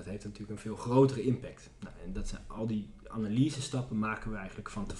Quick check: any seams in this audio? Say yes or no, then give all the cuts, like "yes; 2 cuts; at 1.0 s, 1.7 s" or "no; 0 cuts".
no; 0 cuts